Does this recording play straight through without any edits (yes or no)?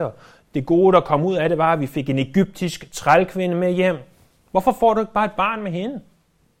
yes